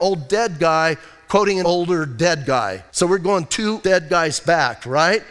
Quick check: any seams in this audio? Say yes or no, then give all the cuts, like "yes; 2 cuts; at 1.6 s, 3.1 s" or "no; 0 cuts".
yes; 3 cuts; at 1.6 s, 2.9 s, 3.8 s